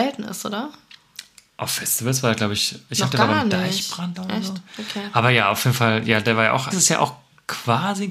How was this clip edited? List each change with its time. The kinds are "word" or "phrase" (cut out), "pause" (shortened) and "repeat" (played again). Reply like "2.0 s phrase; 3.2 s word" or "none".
4.1 s word; 6.7 s word

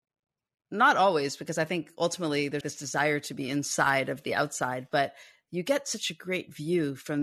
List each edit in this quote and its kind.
2.6 s word

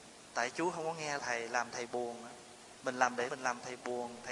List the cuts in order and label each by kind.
1.2 s word; 3.3 s word

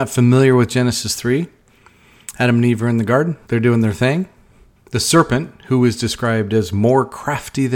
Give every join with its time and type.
3.4 s pause

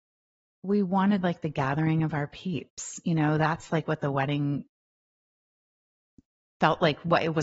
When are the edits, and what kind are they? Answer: none

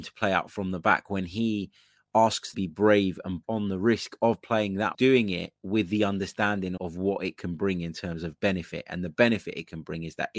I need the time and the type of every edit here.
2.5 s phrase; 3.4 s phrase; 4.9 s phrase; 5.6 s pause; 6.8 s word

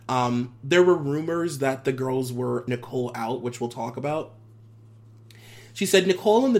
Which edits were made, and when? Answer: 2.7 s word

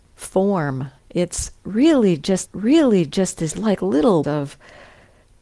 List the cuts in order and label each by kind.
1.0 s pause; 2.5 s repeat; 4.2 s word

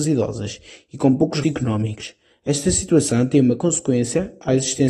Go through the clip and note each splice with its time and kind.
1.4 s word

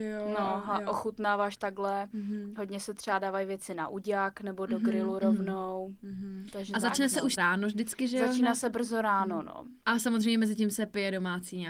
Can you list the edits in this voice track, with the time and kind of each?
7.4 s word; 9.8 s pause

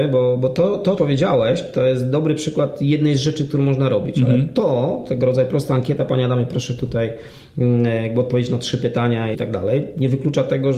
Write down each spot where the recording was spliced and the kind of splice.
1.0 s word; 9.3 s word

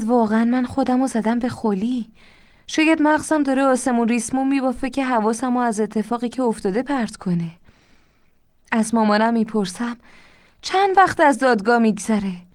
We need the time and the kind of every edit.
none

